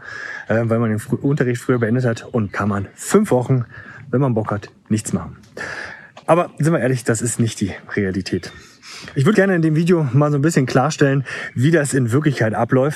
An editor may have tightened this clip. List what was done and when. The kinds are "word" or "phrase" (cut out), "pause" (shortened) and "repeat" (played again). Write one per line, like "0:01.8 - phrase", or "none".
0:02.5 - word
0:06.2 - pause
0:09.3 - word

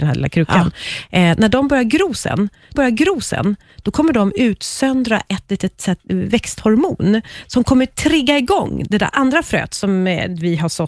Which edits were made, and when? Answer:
0:02.8 - repeat

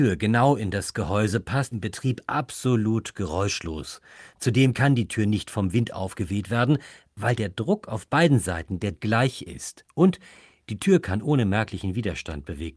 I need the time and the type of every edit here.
0:01.7 - phrase
0:08.9 - word

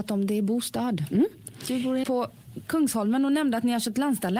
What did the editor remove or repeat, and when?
0:02.0 - word

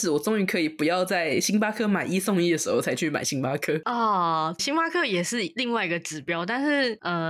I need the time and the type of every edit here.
0:04.6 - word

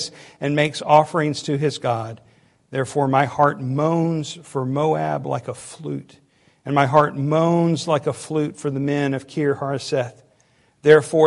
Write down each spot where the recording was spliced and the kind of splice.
none

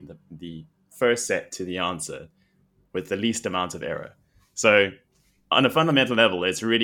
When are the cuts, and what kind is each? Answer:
none

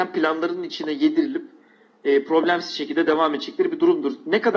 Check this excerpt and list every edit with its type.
none

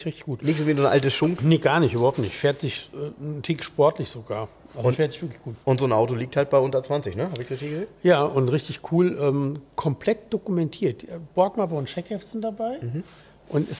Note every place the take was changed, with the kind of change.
0:05.6 - pause

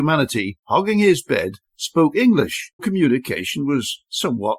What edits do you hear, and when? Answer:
0:02.8 - word

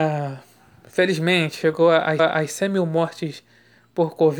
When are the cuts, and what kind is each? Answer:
0:02.2 - repeat

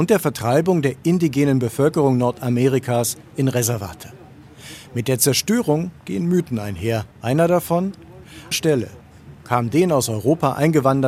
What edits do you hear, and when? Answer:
0:07.1 - pause
0:08.5 - phrase

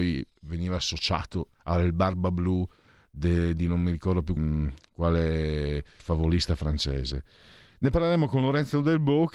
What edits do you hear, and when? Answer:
0:01.5 - pause
0:04.4 - word
0:06.0 - word

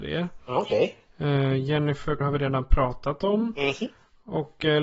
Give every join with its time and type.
0:02.2 - word

